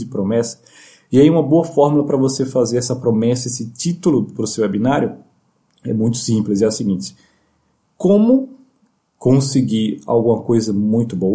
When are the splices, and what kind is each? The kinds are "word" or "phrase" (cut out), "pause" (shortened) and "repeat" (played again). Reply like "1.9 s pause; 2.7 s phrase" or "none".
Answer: none